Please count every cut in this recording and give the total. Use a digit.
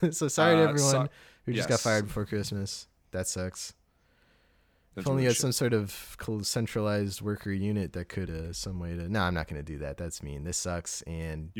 1